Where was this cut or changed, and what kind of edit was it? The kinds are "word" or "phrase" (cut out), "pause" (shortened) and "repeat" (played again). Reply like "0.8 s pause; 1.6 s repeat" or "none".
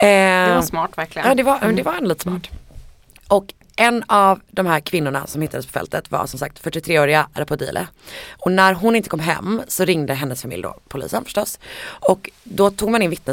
7.3 s word